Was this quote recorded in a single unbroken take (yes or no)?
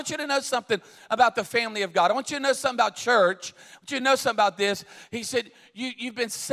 yes